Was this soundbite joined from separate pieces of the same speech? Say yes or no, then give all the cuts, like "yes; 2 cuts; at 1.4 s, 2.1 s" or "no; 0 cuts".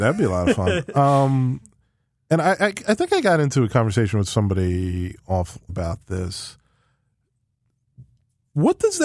yes; 1 cut; at 5.7 s